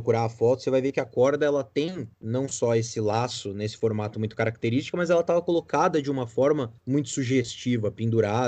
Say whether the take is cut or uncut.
cut